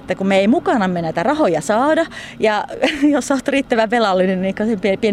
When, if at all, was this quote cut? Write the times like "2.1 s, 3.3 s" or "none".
none